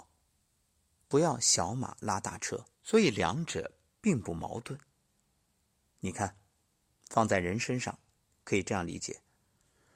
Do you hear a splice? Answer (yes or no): yes